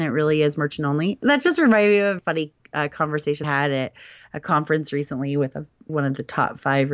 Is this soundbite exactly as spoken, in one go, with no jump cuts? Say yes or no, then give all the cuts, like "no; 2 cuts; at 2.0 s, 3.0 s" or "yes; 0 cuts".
no; 3 cuts; at 2.2 s, 3.4 s, 5.9 s